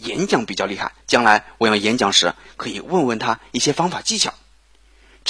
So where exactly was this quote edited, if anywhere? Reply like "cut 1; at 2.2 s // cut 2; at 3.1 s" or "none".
cut 1; at 1.0 s